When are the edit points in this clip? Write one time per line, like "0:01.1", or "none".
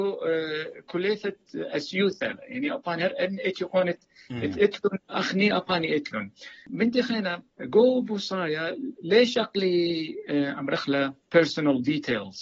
0:07.5
0:11.2

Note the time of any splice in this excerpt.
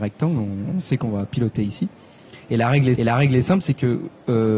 0:03.0

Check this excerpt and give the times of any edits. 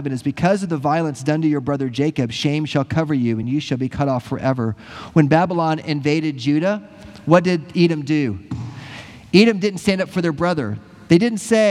none

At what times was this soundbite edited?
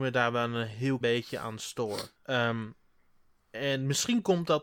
0:01.0
0:02.2

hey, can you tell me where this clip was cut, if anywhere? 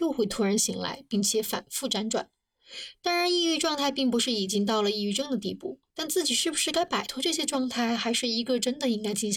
0:05.9

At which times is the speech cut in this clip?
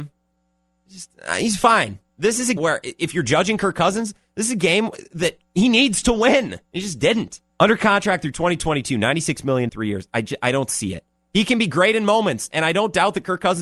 0:02.1
0:02.6
0:06.6
0:07.5
0:09.7

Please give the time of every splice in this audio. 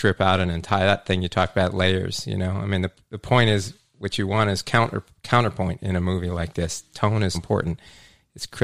0:07.3

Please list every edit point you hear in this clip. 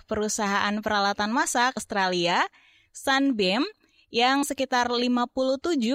0:01.8
0:04.4

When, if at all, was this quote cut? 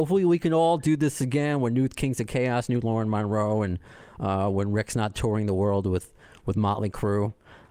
none

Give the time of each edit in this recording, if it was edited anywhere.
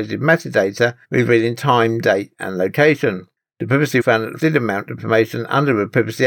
0:01.0
0:04.0
0:04.4
0:05.0

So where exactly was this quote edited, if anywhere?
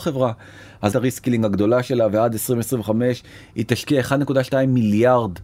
0:00.9

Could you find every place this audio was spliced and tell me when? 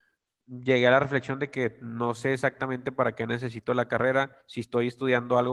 0:04.4

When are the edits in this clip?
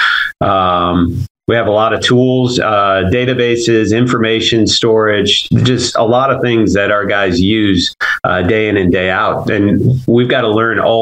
0:01.4

